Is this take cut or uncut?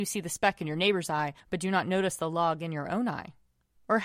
cut